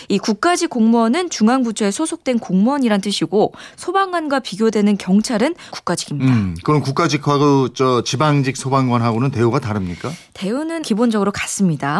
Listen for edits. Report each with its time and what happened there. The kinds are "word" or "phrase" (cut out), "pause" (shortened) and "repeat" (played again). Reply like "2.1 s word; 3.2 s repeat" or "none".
5.7 s word; 10.8 s word